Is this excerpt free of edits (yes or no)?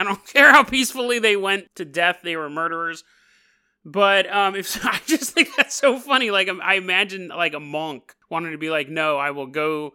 yes